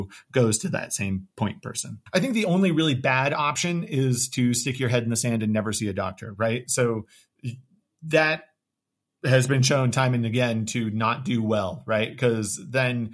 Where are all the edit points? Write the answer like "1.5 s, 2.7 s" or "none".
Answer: 1.3 s, 2.1 s